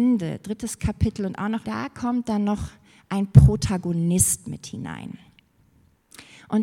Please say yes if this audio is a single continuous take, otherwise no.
no